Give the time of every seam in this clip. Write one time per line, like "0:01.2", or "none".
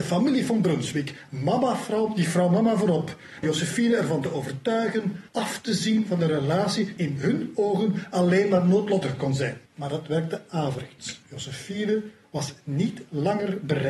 0:03.4
0:05.3
0:07.0
0:09.7
0:11.2